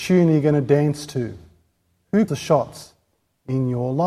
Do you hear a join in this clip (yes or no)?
yes